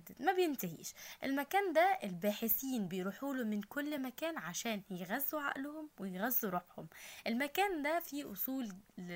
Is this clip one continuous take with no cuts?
yes; 0 cuts

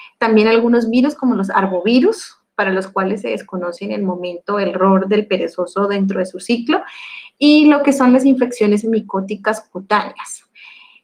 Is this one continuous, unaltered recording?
yes; 0 cuts

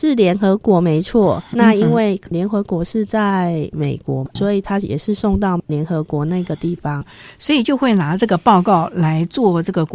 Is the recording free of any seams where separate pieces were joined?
yes; 0 cuts

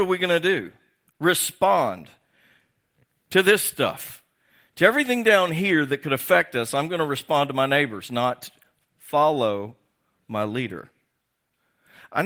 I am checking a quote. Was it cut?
no; 0 cuts

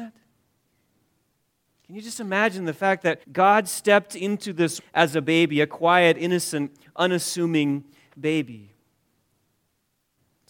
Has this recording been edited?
yes; 2 cuts; at 3.2 s, 4.8 s

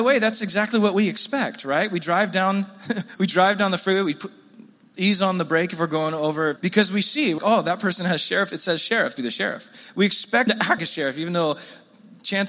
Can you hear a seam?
yes; 6 cuts; at 3.2 s, 6.6 s, 7.4 s, 9.1 s, 10.5 s, 10.8 s

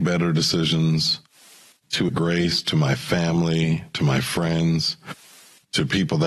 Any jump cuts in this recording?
yes; 1 cut; at 2.1 s

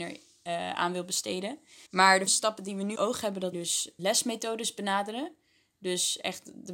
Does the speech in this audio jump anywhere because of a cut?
yes; 5 cuts; at 1.9 s, 2.3 s, 3.0 s, 3.5 s, 4.0 s

